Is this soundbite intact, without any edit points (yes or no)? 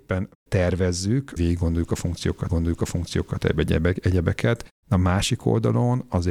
no